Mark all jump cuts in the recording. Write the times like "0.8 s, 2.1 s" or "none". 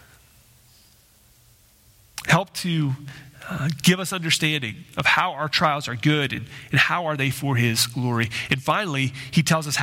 none

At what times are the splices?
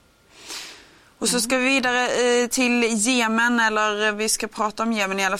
none

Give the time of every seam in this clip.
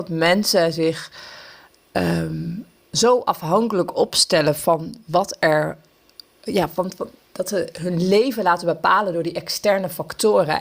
none

